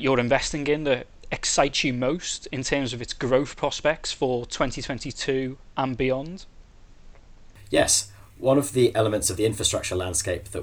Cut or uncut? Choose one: uncut